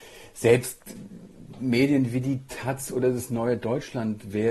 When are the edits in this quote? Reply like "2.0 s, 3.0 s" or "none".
none